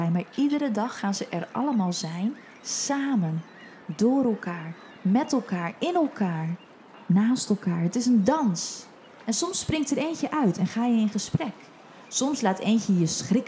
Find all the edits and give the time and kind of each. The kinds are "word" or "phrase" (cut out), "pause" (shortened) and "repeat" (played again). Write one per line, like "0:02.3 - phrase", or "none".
none